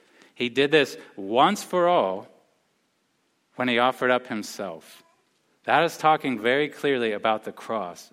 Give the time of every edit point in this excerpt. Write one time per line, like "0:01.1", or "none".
none